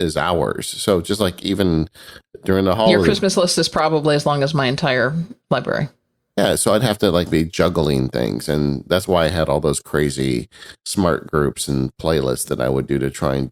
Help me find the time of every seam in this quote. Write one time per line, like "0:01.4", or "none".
0:05.4
0:07.3